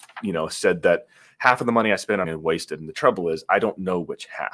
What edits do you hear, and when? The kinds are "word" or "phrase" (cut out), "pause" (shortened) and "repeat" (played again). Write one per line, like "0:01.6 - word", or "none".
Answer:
0:02.2 - word